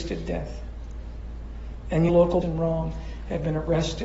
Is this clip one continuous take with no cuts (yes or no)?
no